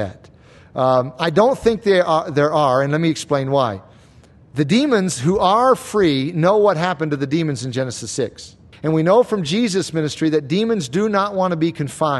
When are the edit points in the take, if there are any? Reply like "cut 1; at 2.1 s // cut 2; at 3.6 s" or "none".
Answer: cut 1; at 8.7 s